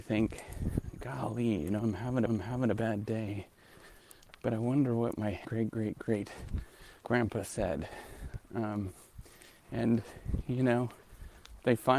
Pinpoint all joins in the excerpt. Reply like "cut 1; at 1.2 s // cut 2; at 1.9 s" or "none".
cut 1; at 2.3 s // cut 2; at 5.4 s // cut 3; at 7.0 s // cut 4; at 9.6 s